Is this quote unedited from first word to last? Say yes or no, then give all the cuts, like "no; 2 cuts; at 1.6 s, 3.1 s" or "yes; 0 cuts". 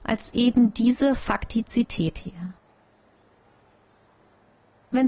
yes; 0 cuts